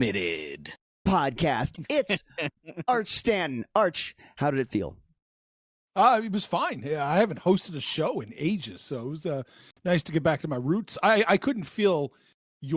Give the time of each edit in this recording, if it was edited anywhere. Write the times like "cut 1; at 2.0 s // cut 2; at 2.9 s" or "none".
none

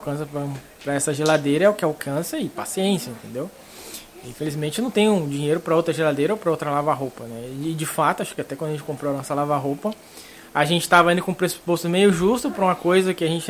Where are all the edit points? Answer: none

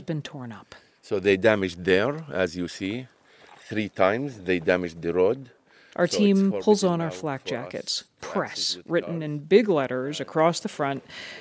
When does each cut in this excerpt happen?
none

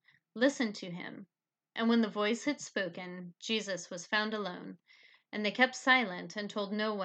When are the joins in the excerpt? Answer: none

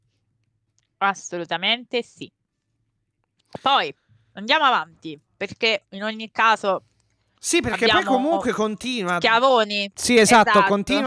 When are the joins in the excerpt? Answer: none

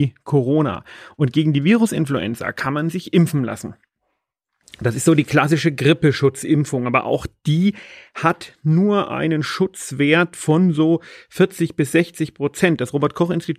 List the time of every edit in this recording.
none

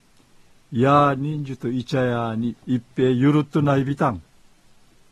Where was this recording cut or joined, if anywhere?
cut 1; at 2.6 s

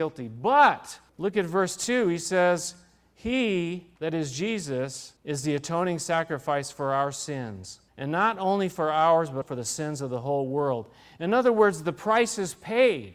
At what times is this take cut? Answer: cut 1; at 1.1 s // cut 2; at 4.0 s // cut 3; at 5.2 s // cut 4; at 7.9 s // cut 5; at 9.4 s

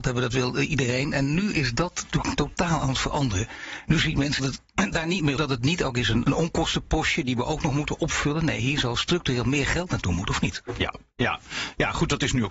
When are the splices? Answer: cut 1; at 4.4 s // cut 2; at 5.4 s // cut 3; at 6.2 s

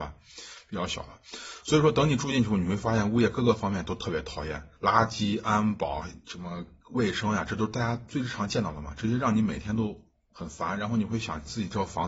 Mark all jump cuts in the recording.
cut 1; at 4.8 s

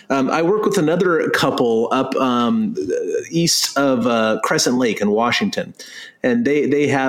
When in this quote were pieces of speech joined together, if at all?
none

